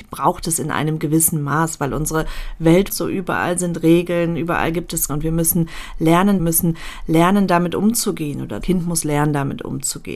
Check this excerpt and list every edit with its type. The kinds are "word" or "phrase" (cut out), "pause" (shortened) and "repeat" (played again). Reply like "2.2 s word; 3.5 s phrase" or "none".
2.9 s word; 5.1 s word; 6.4 s repeat; 8.6 s word

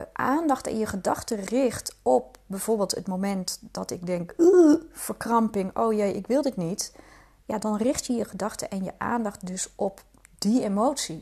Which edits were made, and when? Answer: none

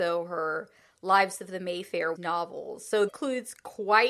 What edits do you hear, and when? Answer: 2.2 s word; 3.1 s word

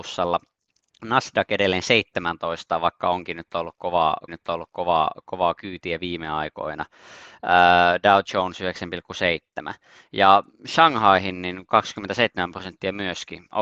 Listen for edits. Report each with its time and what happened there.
4.3 s repeat

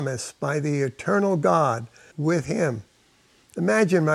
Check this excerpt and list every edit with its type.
2.1 s phrase

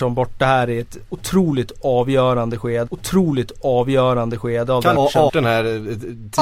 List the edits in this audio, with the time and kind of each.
2.9 s repeat; 4.9 s phrase; 5.3 s word

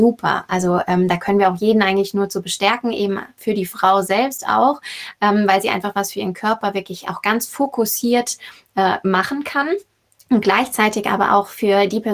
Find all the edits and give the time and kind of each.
none

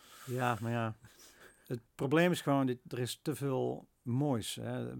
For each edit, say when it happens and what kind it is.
3.9 s pause

